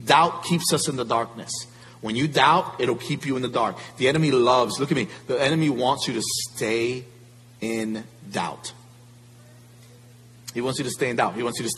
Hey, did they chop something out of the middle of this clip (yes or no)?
no